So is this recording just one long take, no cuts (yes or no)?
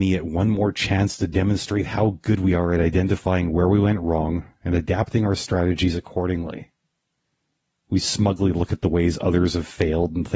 yes